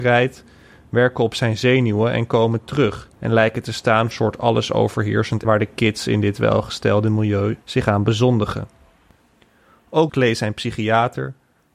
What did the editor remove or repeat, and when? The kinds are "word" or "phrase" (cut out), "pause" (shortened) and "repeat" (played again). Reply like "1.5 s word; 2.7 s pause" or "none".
3.2 s pause; 4.1 s phrase; 5.4 s word; 7.6 s pause; 10.1 s word